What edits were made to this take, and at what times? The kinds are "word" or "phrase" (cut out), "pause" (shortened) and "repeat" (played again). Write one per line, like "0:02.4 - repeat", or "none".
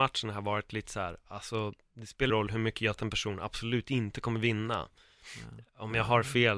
0:02.3 - word
0:03.0 - phrase